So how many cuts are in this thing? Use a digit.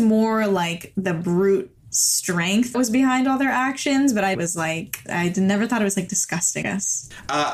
3